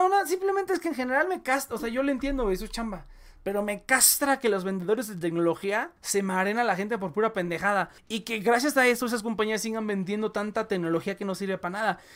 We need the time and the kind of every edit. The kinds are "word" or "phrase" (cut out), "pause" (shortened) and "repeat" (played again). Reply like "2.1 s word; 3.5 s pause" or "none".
6.0 s pause; 8.0 s pause